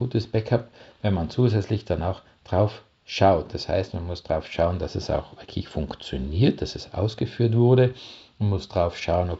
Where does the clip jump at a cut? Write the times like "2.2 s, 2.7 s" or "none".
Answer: none